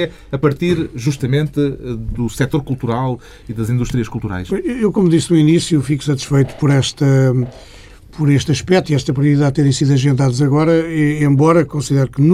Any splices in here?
no; 0 cuts

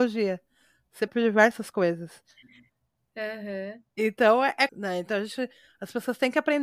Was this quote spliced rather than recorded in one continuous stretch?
yes; 2 cuts; at 1.1 s, 4.7 s

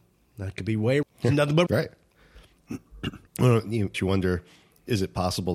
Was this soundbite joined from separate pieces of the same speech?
yes; 4 cuts; at 1.0 s, 1.7 s, 3.3 s, 3.9 s

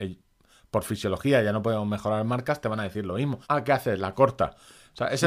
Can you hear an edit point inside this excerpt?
yes; 1 cut; at 3.4 s

